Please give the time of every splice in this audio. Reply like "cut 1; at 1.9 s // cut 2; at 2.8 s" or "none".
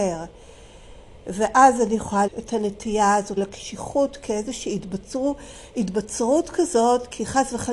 cut 1; at 2.3 s // cut 2; at 3.4 s